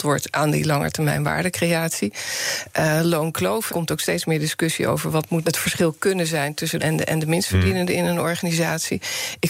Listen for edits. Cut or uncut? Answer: cut